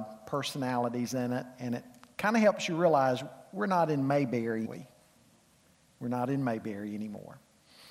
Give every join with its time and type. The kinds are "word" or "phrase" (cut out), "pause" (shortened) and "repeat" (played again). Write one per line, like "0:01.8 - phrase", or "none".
0:04.6 - phrase